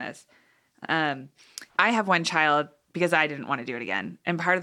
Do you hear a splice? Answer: yes; 1 cut; at 1.7 s

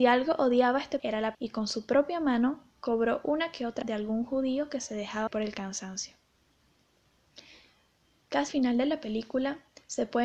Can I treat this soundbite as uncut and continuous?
no; 5 cuts; at 1.0 s, 1.3 s, 3.8 s, 5.3 s, 8.5 s

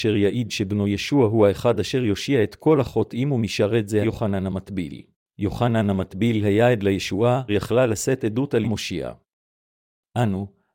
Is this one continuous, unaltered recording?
no; 4 cuts; at 4.0 s, 5.1 s, 7.5 s, 8.6 s

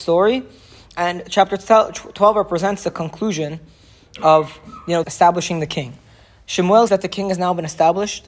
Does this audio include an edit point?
yes; 2 cuts; at 5.0 s, 6.9 s

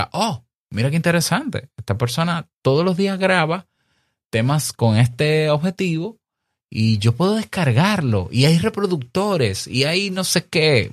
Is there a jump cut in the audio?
no; 0 cuts

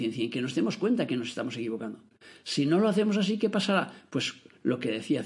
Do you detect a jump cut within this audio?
no; 0 cuts

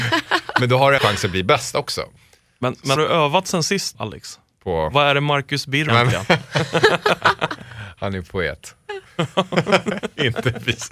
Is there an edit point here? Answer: yes; 4 cuts; at 1.0 s, 3.0 s, 3.9 s, 5.9 s

